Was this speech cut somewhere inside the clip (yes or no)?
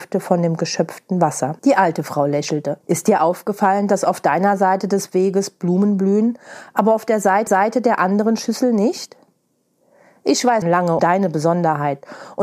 yes